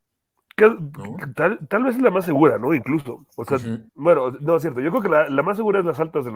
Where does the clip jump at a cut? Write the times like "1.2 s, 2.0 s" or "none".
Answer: 3.3 s, 3.9 s

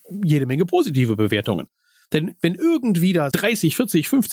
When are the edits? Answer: 3.3 s

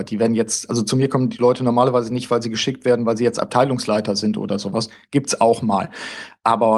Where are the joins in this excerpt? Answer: none

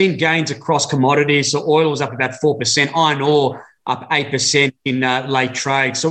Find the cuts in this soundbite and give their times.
none

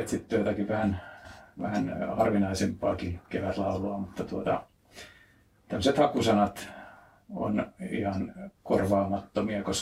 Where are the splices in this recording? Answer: none

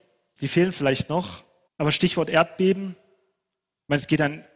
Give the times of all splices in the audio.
1.7 s

